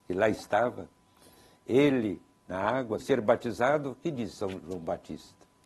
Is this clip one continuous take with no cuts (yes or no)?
no